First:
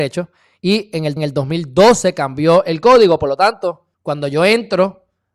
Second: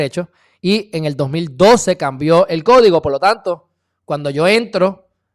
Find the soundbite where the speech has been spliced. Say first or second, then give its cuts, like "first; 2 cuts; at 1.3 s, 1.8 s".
first; 2 cuts; at 1.2 s, 3.9 s